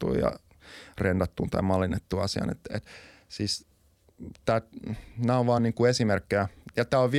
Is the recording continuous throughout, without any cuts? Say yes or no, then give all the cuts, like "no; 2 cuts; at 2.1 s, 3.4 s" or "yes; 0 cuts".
yes; 0 cuts